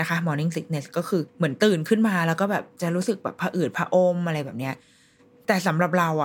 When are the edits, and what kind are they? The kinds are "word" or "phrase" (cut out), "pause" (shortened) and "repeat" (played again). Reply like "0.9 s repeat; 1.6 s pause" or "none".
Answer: 1.3 s pause